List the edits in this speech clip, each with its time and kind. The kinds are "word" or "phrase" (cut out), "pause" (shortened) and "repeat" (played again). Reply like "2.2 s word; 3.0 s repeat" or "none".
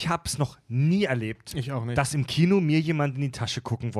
none

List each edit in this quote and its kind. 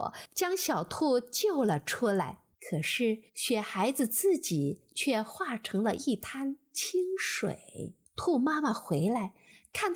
2.5 s pause; 3.3 s pause; 8.1 s pause

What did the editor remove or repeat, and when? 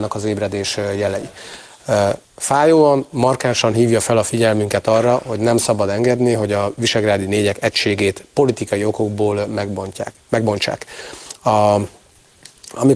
2.2 s pause

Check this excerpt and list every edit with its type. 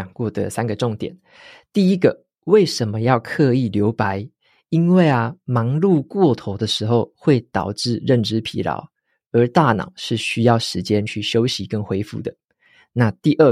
none

